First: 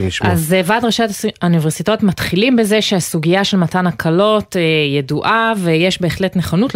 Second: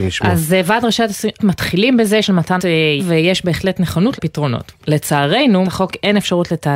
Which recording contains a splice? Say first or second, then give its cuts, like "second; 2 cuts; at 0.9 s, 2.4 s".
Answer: second; 6 cuts; at 1.4 s, 2.2 s, 2.6 s, 3.0 s, 4.2 s, 5.6 s